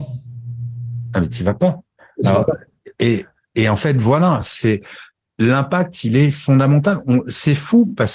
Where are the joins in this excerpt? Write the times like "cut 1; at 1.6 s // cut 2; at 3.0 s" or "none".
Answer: none